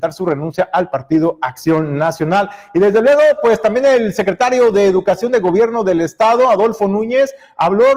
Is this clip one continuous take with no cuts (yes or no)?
yes